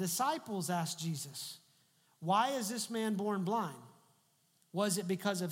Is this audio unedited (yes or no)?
yes